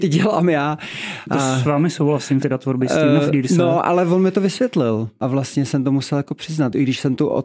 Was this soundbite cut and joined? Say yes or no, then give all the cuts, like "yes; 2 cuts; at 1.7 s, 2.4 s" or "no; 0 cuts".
yes; 1 cut; at 2.4 s